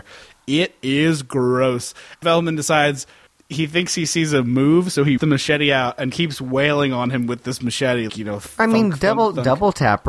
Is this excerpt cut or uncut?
cut